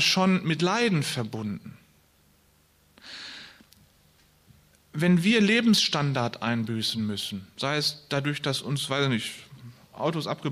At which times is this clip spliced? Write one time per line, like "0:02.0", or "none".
none